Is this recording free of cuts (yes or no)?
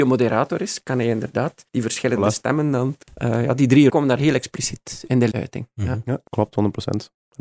no